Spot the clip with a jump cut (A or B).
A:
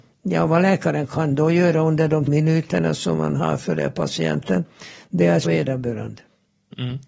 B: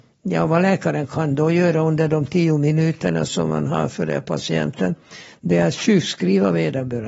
A